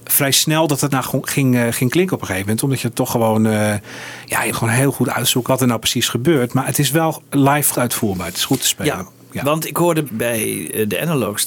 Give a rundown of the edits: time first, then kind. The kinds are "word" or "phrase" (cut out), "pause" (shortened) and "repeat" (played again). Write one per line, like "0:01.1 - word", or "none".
0:00.9 - word
0:04.5 - word
0:05.5 - word
0:07.7 - word
0:10.1 - word